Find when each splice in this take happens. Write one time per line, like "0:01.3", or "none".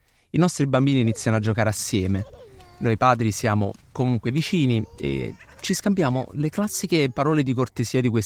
none